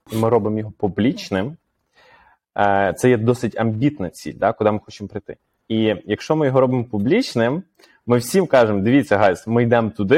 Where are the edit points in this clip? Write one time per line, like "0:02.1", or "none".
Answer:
none